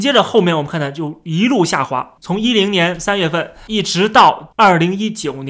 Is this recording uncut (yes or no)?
no